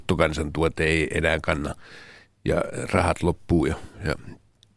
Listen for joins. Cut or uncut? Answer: uncut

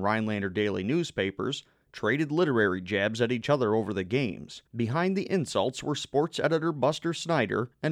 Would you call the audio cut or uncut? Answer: cut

